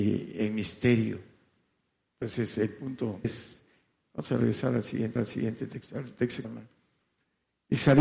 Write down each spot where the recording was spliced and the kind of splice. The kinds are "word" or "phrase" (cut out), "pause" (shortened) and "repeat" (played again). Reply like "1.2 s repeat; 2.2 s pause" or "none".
3.2 s word; 5.2 s repeat; 6.4 s word